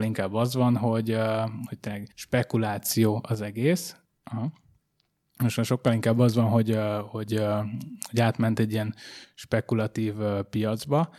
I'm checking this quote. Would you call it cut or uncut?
cut